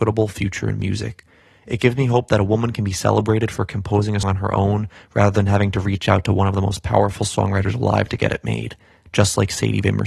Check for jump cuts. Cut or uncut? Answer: cut